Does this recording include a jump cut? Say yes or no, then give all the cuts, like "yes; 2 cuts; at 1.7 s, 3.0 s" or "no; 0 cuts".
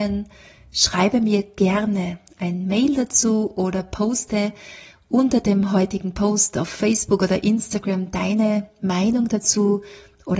no; 0 cuts